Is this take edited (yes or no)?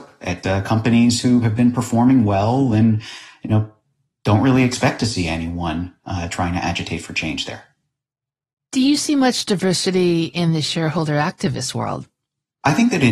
no